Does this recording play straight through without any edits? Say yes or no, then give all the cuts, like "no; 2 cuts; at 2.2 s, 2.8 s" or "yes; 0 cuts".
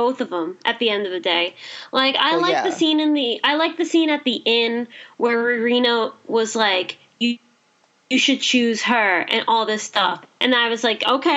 yes; 0 cuts